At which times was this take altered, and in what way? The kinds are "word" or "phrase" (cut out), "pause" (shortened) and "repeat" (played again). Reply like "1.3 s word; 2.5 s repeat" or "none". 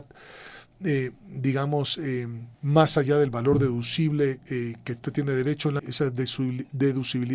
2.5 s pause; 5.8 s word